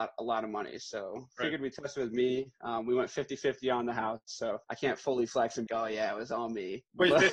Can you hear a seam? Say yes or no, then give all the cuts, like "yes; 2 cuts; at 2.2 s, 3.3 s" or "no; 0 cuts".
yes; 2 cuts; at 4.6 s, 5.7 s